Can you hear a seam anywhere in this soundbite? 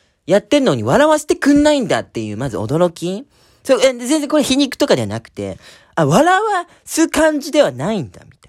no; 0 cuts

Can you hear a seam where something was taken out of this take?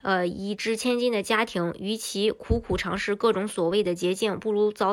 no; 0 cuts

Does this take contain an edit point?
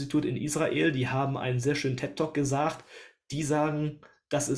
no; 0 cuts

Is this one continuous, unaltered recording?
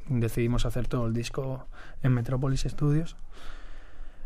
yes; 0 cuts

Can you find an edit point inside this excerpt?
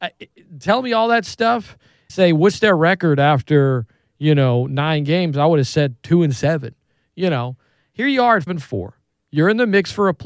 yes; 2 cuts; at 2.1 s, 8.5 s

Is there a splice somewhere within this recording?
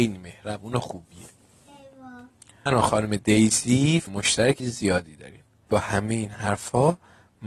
yes; 4 cuts; at 2.7 s, 4.1 s, 4.6 s, 5.7 s

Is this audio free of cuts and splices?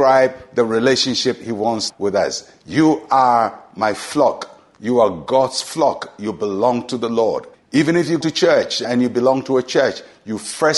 no; 4 cuts; at 1.9 s, 7.5 s, 8.2 s, 8.8 s

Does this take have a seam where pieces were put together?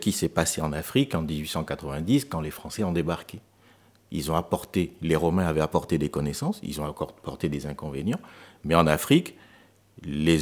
no; 0 cuts

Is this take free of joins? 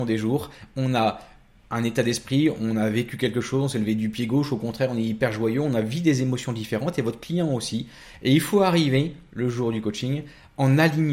yes; 0 cuts

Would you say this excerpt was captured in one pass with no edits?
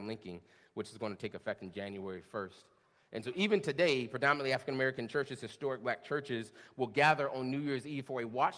yes; 0 cuts

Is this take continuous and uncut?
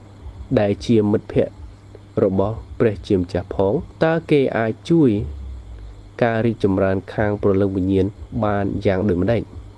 no; 1 cut; at 4.0 s

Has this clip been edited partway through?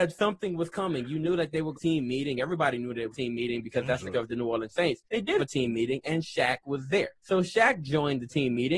yes; 6 cuts; at 1.7 s, 3.1 s, 4.1 s, 5.0 s, 5.4 s, 7.2 s

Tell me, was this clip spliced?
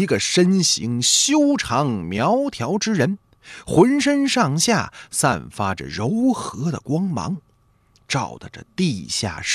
no; 0 cuts

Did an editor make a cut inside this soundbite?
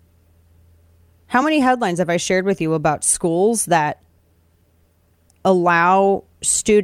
no; 0 cuts

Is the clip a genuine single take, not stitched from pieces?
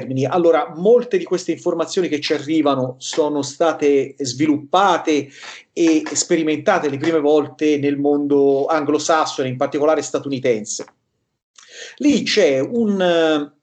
yes; 0 cuts

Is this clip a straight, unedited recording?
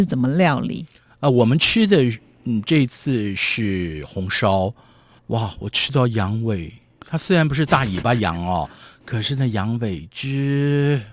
yes; 0 cuts

